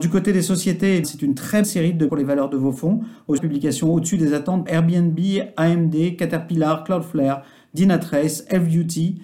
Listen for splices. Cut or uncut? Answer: cut